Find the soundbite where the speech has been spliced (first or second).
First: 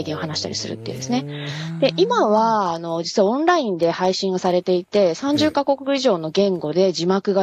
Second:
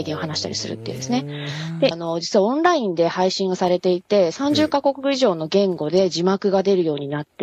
second